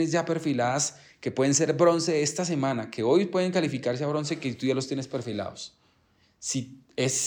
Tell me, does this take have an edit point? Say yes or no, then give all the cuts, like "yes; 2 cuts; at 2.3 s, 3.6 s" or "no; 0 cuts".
no; 0 cuts